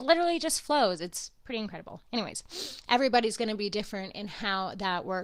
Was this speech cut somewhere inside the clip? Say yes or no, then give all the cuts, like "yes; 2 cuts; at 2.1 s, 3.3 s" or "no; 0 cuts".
no; 0 cuts